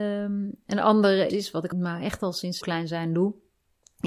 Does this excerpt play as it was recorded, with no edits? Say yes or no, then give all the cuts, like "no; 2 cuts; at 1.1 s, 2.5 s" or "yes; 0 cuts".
no; 3 cuts; at 1.3 s, 1.7 s, 2.6 s